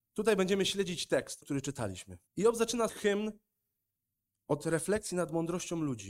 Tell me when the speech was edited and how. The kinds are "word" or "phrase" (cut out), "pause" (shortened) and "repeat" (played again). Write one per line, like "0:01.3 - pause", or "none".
0:01.4 - word
0:02.3 - pause
0:02.9 - word